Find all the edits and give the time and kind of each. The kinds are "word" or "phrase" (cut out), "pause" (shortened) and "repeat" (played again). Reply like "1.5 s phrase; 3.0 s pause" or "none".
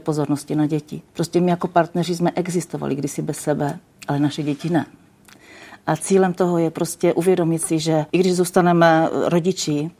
1.1 s pause; 8.1 s pause